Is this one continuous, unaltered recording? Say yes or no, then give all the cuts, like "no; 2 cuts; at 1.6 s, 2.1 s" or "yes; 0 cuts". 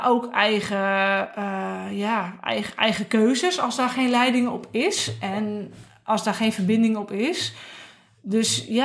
yes; 0 cuts